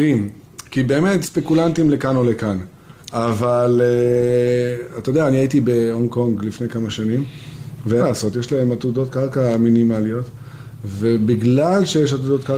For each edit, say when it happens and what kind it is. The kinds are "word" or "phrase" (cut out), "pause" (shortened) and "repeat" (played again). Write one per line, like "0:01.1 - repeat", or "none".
0:01.2 - word
0:03.0 - pause
0:08.0 - word